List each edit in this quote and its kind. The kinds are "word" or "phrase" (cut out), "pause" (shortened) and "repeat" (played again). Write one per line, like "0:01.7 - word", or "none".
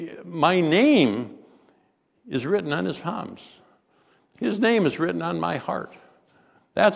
none